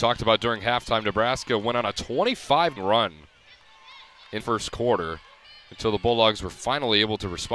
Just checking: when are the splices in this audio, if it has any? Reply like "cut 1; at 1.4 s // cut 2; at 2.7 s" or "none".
cut 1; at 2.8 s // cut 2; at 4.4 s // cut 3; at 5.4 s